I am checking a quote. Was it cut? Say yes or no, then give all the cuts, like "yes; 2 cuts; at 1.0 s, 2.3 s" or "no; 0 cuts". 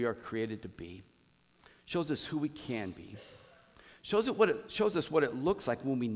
no; 0 cuts